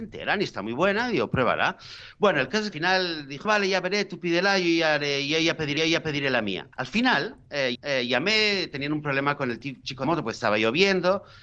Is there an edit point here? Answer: yes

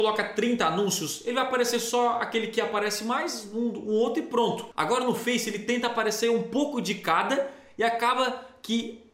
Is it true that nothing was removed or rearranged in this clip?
yes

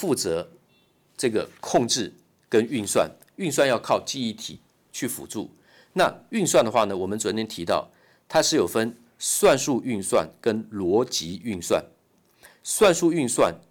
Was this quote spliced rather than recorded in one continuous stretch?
no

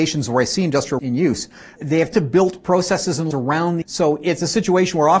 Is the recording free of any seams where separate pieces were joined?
no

